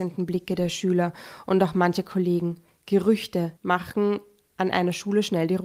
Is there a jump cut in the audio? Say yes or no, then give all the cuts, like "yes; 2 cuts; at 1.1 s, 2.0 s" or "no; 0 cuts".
yes; 1 cut; at 3.6 s